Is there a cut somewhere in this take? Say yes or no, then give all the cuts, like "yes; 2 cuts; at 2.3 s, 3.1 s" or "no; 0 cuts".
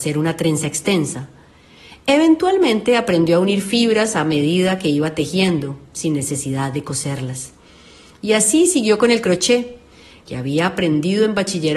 no; 0 cuts